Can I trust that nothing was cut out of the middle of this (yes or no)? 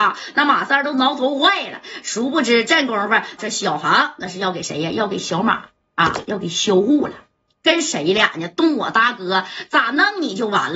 no